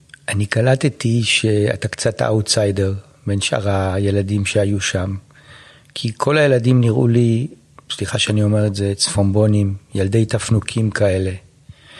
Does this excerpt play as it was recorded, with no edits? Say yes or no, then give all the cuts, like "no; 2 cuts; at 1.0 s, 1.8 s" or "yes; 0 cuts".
yes; 0 cuts